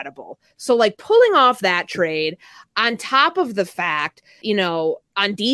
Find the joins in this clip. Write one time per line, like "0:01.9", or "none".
0:04.4